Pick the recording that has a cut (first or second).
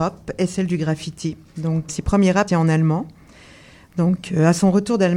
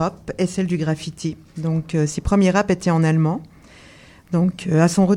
first